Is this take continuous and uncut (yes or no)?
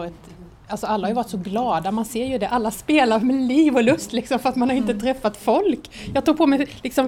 yes